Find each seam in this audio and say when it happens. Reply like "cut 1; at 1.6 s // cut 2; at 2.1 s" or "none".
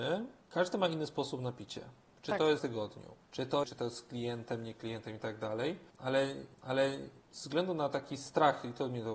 cut 1; at 2.6 s // cut 2; at 3.2 s // cut 3; at 3.6 s // cut 4; at 6.5 s